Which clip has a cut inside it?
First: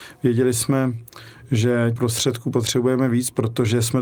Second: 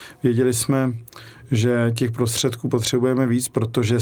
first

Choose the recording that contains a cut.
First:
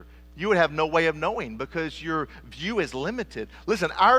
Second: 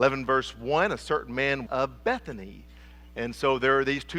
second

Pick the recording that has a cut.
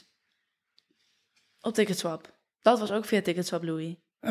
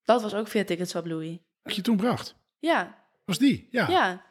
second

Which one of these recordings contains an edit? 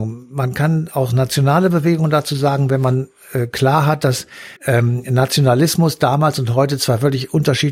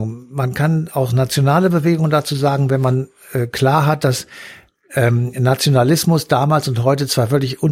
first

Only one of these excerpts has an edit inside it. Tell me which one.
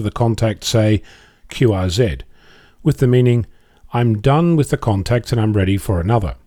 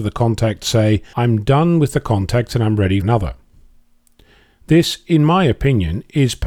second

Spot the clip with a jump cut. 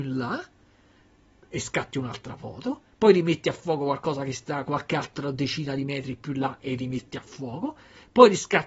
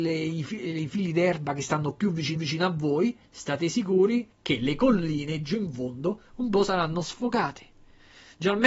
second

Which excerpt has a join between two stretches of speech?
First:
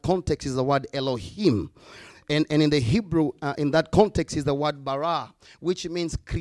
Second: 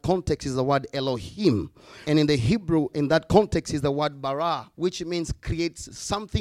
second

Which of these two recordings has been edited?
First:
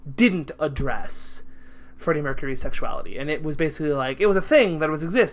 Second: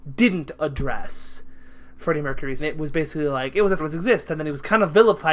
second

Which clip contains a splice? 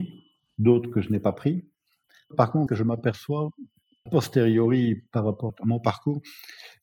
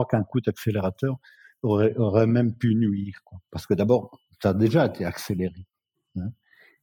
first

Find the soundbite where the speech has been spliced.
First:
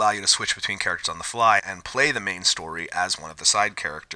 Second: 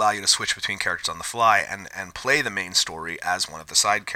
first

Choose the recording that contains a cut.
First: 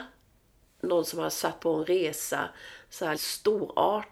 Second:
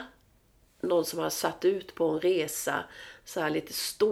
first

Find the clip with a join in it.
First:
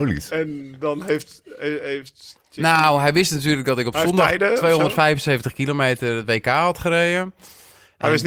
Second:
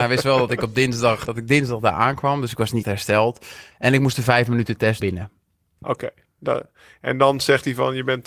second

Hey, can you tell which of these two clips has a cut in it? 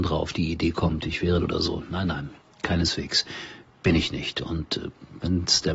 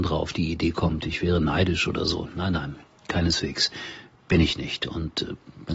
first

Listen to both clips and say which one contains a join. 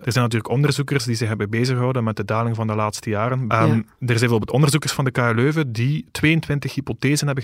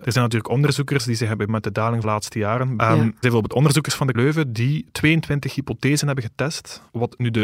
second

